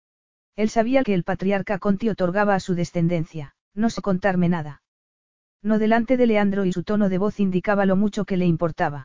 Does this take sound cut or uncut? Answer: cut